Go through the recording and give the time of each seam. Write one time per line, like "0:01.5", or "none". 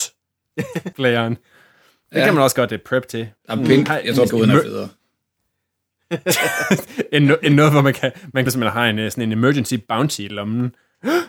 0:00.9
0:03.4
0:04.3
0:08.5